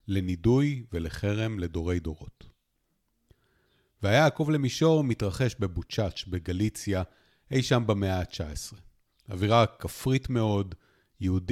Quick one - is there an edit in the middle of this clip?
no; 0 cuts

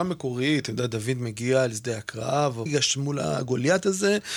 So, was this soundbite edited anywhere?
yes; 1 cut; at 2.7 s

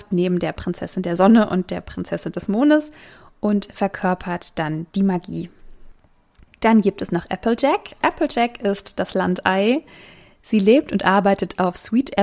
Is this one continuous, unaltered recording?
yes; 0 cuts

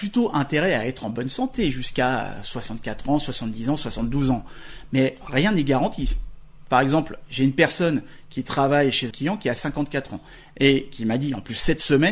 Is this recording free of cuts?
no; 1 cut; at 9.1 s

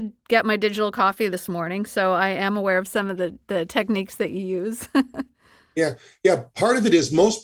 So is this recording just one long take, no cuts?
yes; 0 cuts

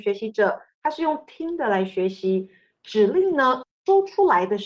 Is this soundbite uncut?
yes; 0 cuts

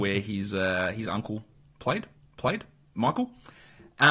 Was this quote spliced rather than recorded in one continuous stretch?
yes; 1 cut; at 2.2 s

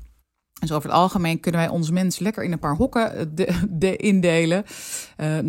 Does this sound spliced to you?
no; 0 cuts

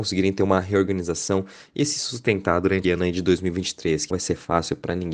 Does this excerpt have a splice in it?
yes; 2 cuts; at 2.8 s, 4.1 s

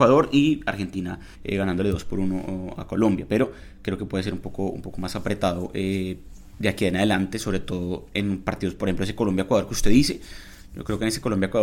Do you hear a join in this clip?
yes; 1 cut; at 1.3 s

